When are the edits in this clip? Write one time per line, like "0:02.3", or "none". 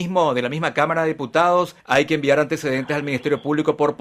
0:01.8